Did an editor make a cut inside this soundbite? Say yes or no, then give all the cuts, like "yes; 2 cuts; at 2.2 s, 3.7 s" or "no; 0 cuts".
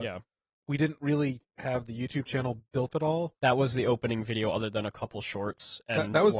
yes; 1 cut; at 2.9 s